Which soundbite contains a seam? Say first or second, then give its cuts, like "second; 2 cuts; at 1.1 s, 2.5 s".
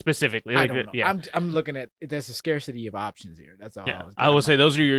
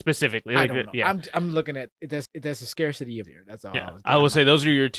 second; 2 cuts; at 2.3 s, 3.2 s